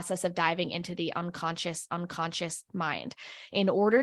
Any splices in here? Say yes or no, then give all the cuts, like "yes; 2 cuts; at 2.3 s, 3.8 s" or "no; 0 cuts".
yes; 1 cut; at 1.9 s